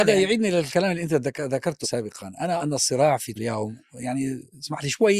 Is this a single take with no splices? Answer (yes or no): no